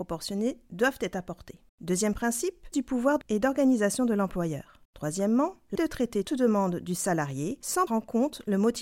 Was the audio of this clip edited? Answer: yes; 7 cuts; at 1.7 s, 2.7 s, 3.2 s, 4.8 s, 5.8 s, 6.2 s, 7.9 s

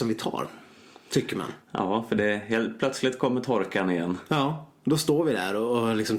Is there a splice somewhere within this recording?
no; 0 cuts

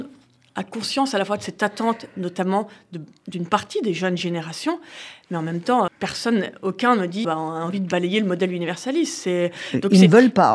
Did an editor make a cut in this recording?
yes; 2 cuts; at 5.9 s, 7.2 s

